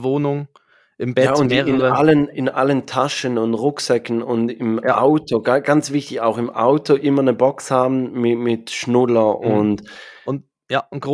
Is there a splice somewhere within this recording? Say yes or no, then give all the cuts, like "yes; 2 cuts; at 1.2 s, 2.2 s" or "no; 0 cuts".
no; 0 cuts